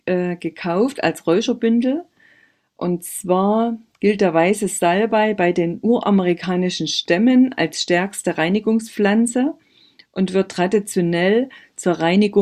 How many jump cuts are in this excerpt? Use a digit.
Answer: 0